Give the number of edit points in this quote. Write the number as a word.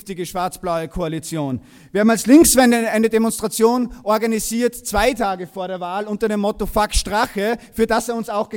zero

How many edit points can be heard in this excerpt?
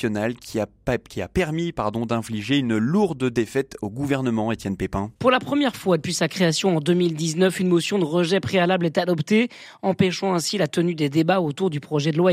one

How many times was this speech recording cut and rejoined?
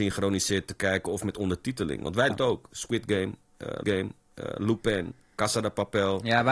two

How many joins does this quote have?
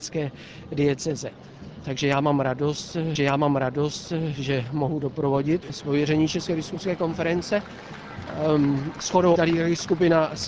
three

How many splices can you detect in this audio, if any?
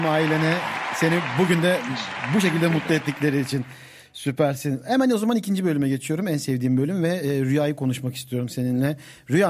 zero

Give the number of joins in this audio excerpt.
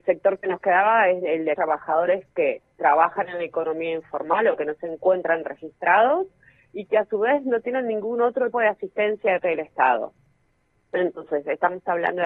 four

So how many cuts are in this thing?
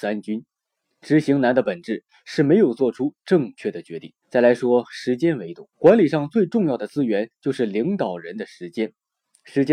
two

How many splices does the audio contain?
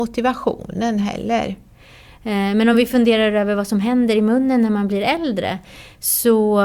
zero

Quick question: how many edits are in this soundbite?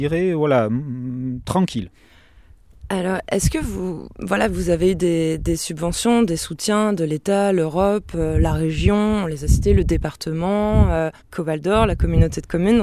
one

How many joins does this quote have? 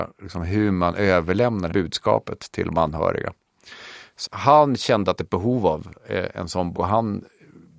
four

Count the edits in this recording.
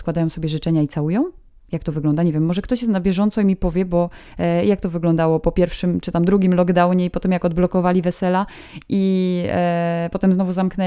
zero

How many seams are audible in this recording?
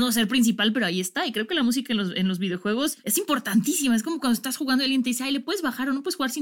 zero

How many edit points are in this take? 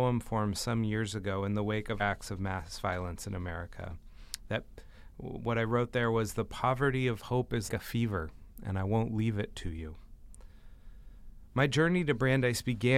two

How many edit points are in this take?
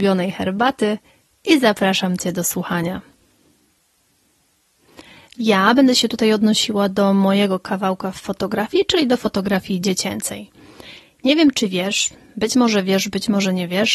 zero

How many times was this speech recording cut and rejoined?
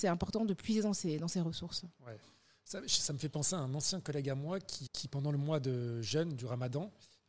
one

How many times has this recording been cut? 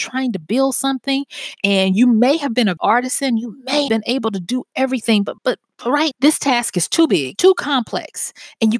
five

